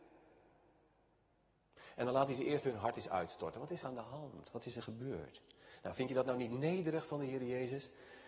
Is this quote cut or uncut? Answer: cut